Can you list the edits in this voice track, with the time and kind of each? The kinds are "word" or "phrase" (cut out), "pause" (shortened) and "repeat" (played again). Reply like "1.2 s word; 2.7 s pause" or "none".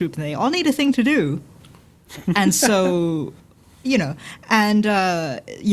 3.4 s pause